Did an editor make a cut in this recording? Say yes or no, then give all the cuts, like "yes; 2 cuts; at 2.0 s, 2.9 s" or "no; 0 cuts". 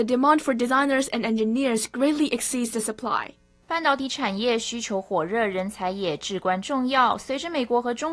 no; 0 cuts